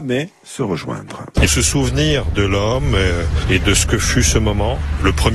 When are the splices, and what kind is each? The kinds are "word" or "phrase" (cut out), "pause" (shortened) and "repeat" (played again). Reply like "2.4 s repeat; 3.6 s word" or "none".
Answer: 1.5 s word